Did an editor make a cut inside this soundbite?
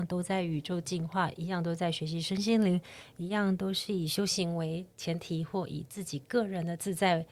no; 0 cuts

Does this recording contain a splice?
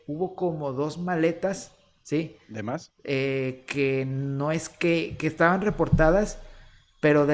no; 0 cuts

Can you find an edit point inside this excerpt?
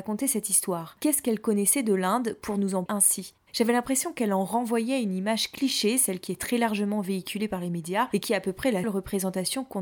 yes; 2 cuts; at 2.9 s, 8.8 s

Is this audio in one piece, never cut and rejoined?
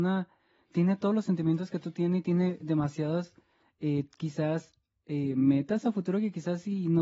yes; 0 cuts

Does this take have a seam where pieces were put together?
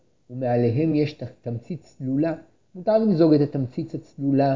no; 0 cuts

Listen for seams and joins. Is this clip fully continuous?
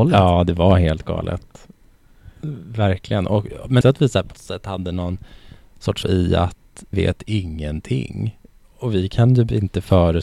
no; 4 cuts; at 3.8 s, 4.3 s, 6.0 s, 6.9 s

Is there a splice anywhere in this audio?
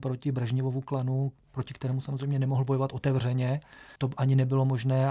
yes; 1 cut; at 4.0 s

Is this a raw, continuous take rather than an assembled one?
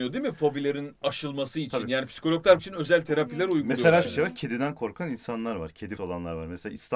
no; 3 cuts; at 2.6 s, 4.0 s, 6.0 s

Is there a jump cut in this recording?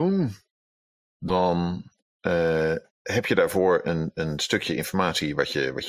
yes; 1 cut; at 2.9 s

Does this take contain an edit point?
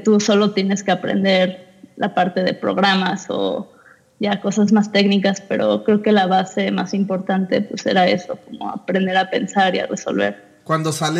no; 0 cuts

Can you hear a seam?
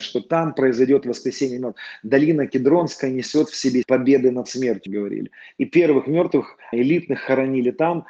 yes; 3 cuts; at 3.8 s, 4.9 s, 6.7 s

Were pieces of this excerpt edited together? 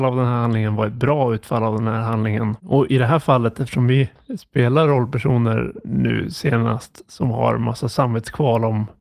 yes; 1 cut; at 2.6 s

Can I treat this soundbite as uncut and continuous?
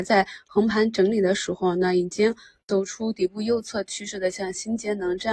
yes; 0 cuts

